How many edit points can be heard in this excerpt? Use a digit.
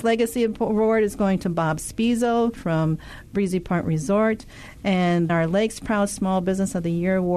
1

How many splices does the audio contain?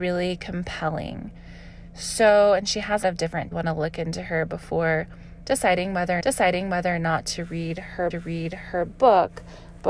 4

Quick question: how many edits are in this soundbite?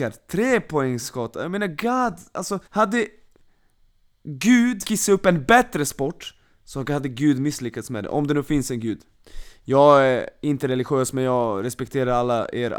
2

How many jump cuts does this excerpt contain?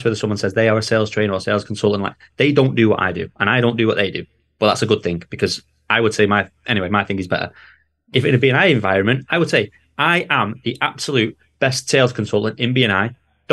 0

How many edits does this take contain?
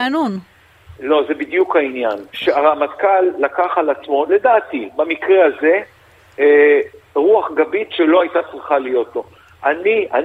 1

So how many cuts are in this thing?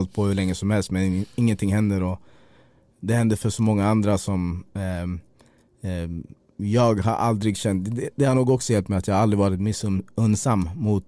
0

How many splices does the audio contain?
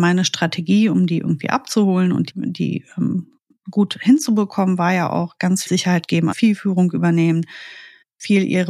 3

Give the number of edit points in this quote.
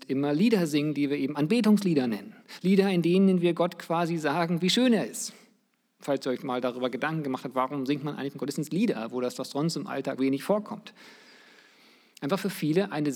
1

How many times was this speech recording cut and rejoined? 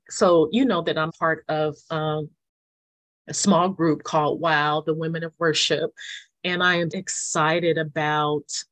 2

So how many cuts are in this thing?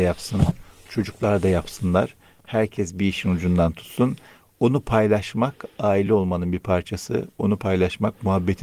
0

